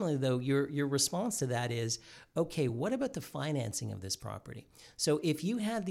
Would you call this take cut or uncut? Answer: uncut